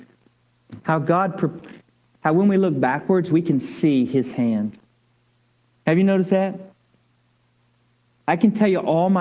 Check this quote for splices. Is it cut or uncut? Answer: uncut